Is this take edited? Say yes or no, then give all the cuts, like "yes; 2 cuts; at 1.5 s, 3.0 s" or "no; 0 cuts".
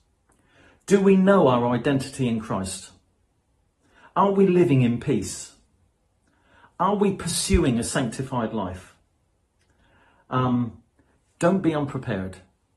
no; 0 cuts